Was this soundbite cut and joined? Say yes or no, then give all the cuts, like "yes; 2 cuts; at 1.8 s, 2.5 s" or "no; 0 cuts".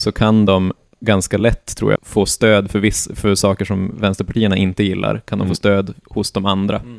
yes; 2 cuts; at 2.0 s, 6.0 s